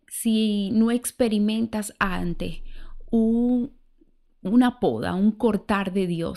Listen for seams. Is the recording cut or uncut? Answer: uncut